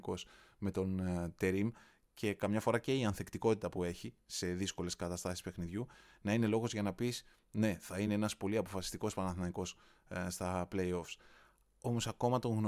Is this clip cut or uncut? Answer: uncut